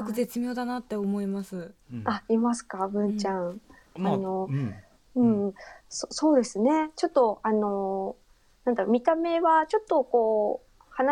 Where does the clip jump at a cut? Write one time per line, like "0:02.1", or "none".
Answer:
none